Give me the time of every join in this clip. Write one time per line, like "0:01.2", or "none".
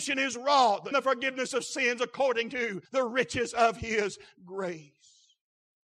0:00.9
0:02.9